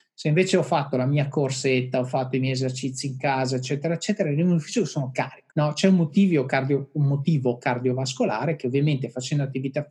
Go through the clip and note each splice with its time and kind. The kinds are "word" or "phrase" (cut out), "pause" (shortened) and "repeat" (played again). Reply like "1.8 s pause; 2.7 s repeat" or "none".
5.5 s pause